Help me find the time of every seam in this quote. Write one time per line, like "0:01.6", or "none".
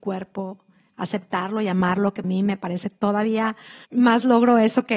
0:02.2
0:03.8